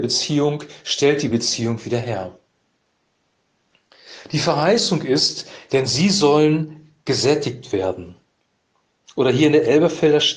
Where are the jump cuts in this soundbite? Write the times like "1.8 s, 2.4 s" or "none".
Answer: none